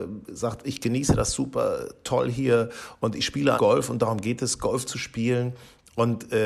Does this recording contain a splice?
yes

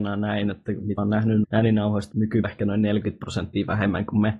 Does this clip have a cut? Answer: yes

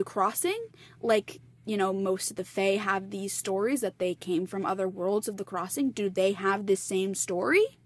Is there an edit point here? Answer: no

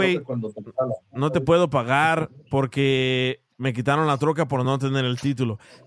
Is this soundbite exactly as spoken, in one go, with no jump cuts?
yes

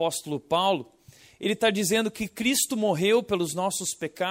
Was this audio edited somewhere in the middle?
no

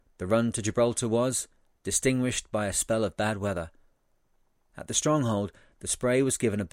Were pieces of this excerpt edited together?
no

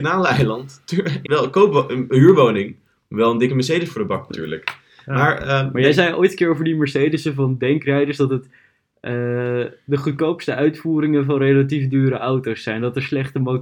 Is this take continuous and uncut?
no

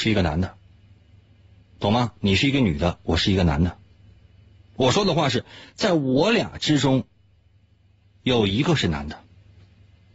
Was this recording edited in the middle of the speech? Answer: no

